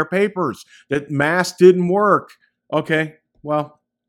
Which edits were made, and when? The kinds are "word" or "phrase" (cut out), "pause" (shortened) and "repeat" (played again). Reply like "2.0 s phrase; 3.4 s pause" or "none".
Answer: none